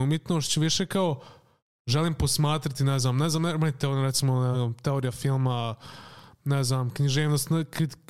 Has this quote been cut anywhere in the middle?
no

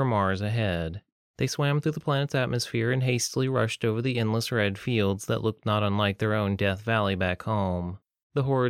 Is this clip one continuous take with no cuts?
yes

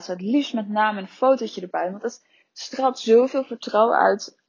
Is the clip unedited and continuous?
yes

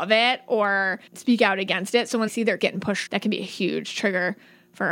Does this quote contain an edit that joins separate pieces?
yes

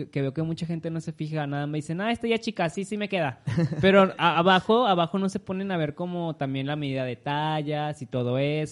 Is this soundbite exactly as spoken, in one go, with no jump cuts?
yes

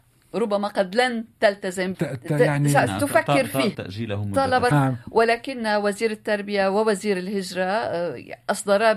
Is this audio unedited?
no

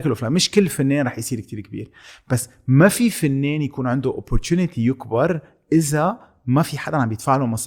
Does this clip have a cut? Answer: no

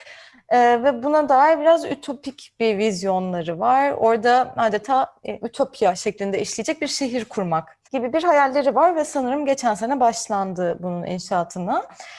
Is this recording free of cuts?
no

